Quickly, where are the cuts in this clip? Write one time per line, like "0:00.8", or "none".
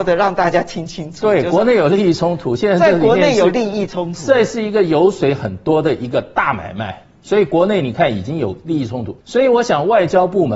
0:09.2